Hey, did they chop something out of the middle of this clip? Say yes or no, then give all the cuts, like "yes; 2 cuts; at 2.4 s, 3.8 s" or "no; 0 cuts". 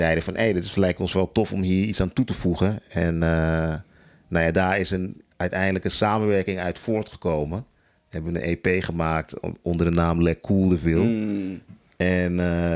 no; 0 cuts